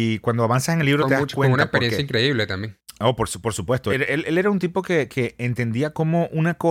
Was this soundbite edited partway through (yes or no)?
no